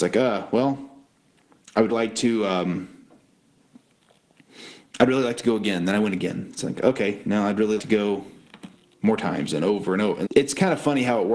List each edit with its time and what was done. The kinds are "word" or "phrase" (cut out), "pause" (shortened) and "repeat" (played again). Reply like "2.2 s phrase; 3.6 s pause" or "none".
1.9 s word; 7.8 s word; 10.3 s word